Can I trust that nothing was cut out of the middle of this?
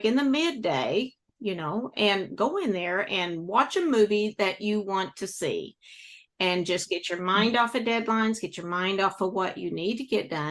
yes; 0 cuts

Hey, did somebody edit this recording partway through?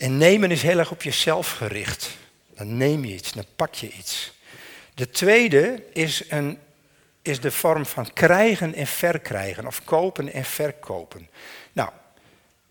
no; 0 cuts

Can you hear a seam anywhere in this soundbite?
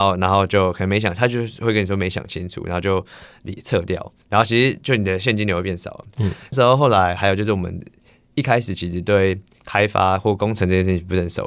no; 0 cuts

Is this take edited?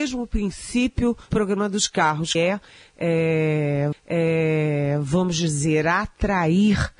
yes; 3 cuts; at 1.3 s, 2.3 s, 3.9 s

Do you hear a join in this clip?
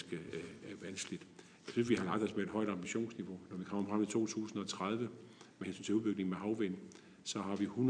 no; 0 cuts

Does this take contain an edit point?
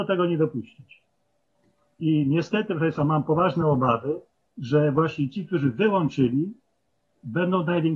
no; 0 cuts

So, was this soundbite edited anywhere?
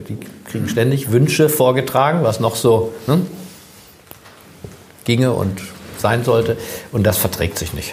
no; 0 cuts

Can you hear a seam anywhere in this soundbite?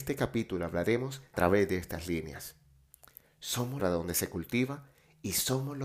yes; 2 cuts; at 1.3 s, 3.8 s

